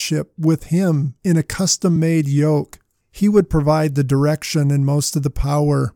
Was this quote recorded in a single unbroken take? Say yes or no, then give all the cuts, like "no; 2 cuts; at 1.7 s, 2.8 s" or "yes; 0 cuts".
yes; 0 cuts